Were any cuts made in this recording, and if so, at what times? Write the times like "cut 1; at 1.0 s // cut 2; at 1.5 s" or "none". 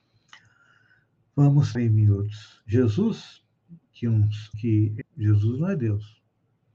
cut 1; at 1.7 s // cut 2; at 4.5 s // cut 3; at 5.0 s